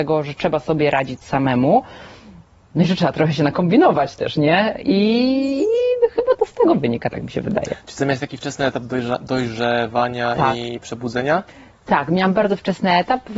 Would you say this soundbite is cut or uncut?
uncut